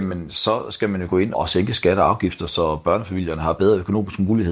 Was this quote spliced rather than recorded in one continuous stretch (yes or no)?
yes